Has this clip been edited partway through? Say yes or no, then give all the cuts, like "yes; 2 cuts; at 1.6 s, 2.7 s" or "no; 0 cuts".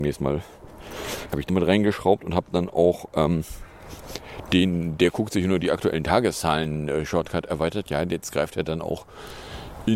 yes; 1 cut; at 1.5 s